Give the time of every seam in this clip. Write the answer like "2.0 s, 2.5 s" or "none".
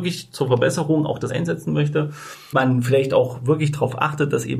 1.3 s, 2.5 s